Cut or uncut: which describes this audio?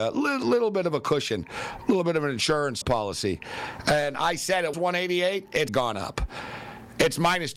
cut